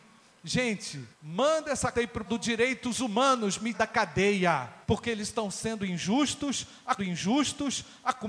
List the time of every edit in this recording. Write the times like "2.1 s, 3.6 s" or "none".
1.1 s, 1.9 s, 2.3 s, 3.7 s, 4.8 s, 7.0 s